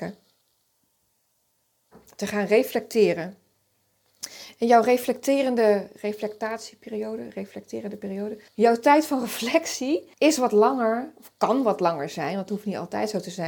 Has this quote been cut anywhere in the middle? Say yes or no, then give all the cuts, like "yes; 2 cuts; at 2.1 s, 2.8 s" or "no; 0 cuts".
yes; 2 cuts; at 8.5 s, 10.1 s